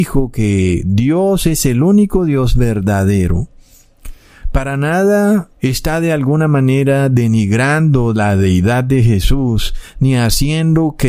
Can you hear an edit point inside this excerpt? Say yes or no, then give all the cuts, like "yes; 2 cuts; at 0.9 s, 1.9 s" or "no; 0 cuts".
yes; 1 cut; at 5.5 s